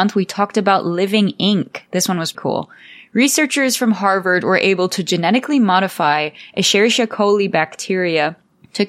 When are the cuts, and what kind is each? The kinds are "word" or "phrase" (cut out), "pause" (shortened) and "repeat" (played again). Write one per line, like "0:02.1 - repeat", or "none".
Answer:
0:02.3 - word

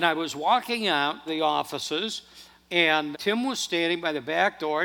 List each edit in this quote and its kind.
0:01.3 - phrase
0:03.1 - word

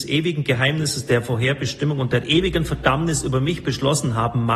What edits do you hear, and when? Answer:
none

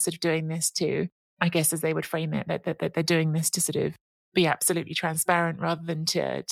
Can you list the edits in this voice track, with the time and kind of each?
none

